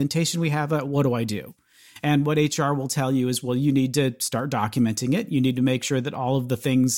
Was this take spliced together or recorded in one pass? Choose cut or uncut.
uncut